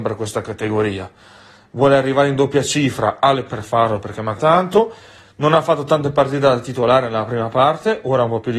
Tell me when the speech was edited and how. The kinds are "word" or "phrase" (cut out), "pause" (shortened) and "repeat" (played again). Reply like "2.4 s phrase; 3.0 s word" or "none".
3.5 s word; 4.4 s word